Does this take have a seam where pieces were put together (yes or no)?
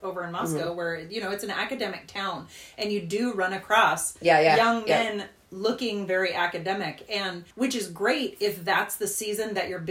yes